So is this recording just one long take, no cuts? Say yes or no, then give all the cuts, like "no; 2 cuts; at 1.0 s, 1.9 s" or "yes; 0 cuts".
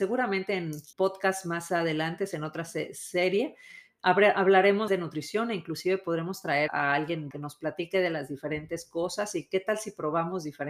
no; 4 cuts; at 0.9 s, 4.9 s, 6.7 s, 7.3 s